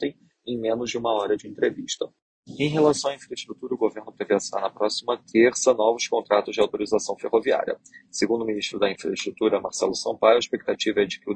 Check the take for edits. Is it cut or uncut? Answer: uncut